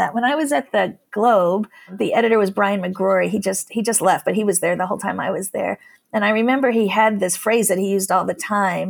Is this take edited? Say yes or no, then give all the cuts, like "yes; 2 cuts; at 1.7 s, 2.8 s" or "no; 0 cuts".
no; 0 cuts